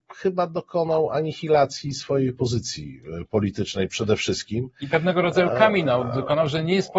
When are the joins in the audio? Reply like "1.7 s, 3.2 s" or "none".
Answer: none